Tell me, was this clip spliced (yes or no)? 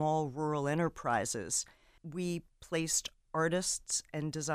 no